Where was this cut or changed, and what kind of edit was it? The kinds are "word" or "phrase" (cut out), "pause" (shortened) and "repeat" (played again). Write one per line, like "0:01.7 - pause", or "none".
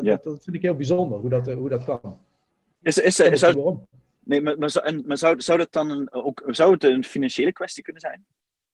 0:03.5 - word